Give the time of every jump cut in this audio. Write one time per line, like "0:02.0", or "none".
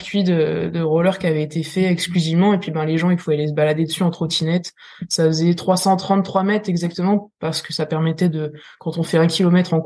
none